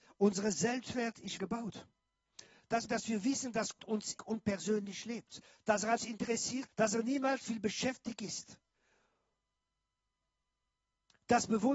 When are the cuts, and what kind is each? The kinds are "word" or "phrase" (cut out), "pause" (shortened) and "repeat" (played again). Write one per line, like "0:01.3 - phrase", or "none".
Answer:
0:01.4 - word
0:02.9 - word
0:03.8 - word
0:04.2 - word
0:06.0 - word
0:06.7 - word
0:07.4 - word